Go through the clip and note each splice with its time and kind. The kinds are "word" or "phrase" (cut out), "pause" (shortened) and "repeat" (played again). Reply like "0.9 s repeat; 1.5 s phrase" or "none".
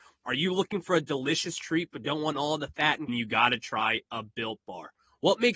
3.1 s phrase